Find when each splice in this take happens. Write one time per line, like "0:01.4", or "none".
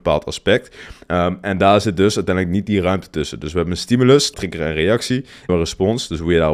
0:04.3
0:05.5